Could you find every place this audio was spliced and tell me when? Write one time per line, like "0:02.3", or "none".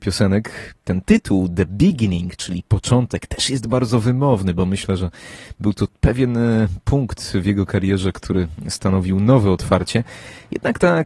none